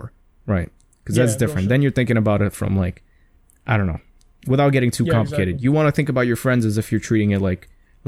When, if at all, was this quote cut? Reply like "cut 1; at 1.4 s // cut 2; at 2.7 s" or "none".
none